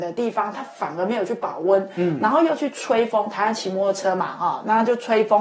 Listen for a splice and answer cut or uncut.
uncut